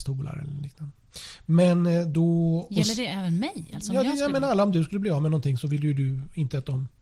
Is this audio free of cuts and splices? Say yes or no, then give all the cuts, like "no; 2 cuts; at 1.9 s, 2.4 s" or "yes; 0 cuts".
yes; 0 cuts